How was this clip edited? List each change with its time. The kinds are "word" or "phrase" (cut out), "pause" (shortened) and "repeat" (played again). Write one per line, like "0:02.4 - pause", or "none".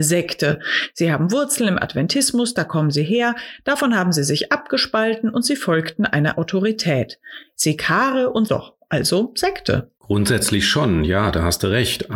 0:08.5 - phrase
0:10.0 - pause

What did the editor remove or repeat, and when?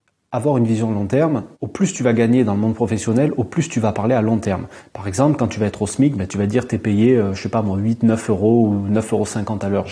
0:01.5 - pause

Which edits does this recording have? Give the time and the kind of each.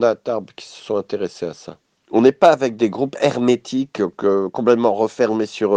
none

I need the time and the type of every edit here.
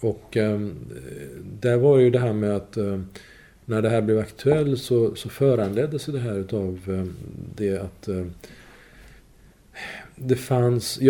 none

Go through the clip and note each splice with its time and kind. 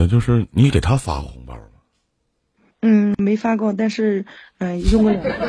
0:02.7 - pause

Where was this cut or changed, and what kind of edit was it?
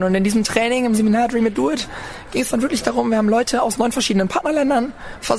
none

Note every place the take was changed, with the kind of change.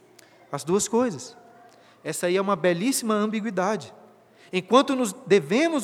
none

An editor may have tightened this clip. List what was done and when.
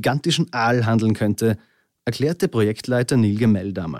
none

